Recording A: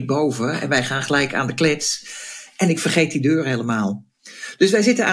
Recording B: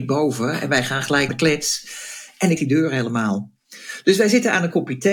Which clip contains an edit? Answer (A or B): B